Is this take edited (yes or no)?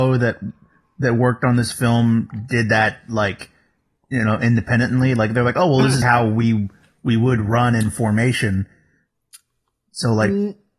yes